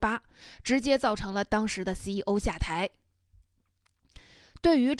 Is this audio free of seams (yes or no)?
yes